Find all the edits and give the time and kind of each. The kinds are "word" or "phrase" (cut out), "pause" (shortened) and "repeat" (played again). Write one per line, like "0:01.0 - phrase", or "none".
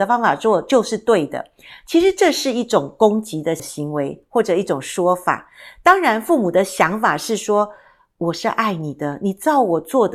none